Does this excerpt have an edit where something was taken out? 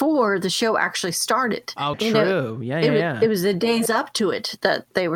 yes; 1 cut; at 1.9 s

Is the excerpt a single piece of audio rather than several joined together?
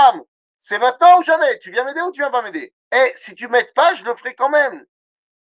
no; 1 cut; at 2.8 s

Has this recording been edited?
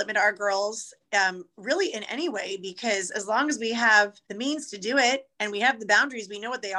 yes; 2 cuts; at 4.2 s, 5.3 s

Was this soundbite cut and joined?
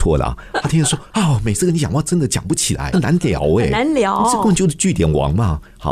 yes; 1 cut; at 2.9 s

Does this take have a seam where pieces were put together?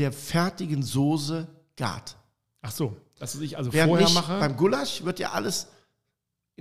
no; 0 cuts

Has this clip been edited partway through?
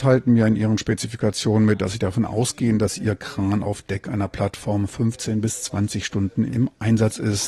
yes; 1 cut; at 6.5 s

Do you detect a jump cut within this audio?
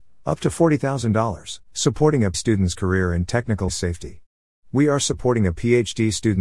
yes; 3 cuts; at 1.6 s, 2.3 s, 3.7 s

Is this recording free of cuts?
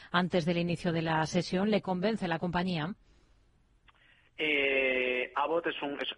yes; 0 cuts

